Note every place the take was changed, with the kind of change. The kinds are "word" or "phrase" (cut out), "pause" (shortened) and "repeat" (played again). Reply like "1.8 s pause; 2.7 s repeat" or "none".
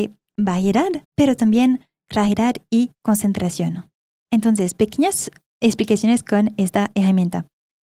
1.0 s pause; 2.9 s pause